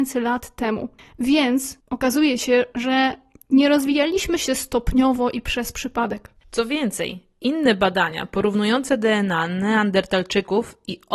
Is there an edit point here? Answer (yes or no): no